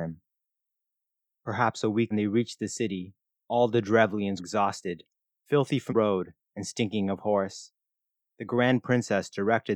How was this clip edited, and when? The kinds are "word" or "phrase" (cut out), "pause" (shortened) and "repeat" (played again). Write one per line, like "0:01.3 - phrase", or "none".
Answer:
0:02.1 - phrase
0:04.4 - word
0:05.9 - word